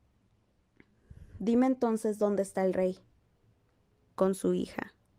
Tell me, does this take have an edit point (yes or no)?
no